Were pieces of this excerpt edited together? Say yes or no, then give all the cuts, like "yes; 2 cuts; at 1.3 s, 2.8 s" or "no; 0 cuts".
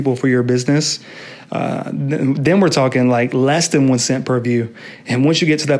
no; 0 cuts